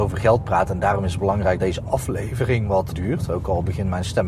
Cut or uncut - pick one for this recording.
cut